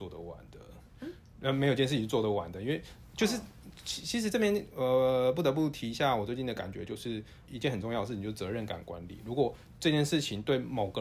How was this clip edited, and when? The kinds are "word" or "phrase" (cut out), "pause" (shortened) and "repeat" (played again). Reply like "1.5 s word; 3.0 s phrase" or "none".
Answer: 7.5 s word